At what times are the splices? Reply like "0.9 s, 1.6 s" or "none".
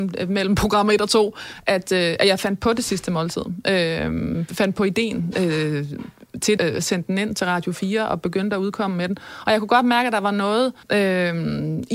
6.6 s, 10.8 s